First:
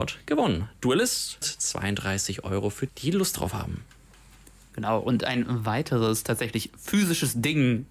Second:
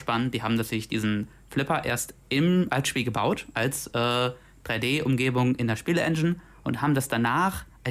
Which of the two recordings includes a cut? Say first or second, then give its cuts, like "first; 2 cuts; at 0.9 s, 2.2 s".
first; 2 cuts; at 1.4 s, 2.9 s